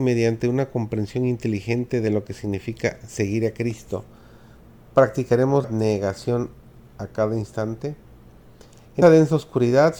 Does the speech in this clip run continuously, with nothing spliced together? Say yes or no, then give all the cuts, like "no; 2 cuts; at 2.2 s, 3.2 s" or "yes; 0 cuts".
no; 2 cuts; at 5.6 s, 9.0 s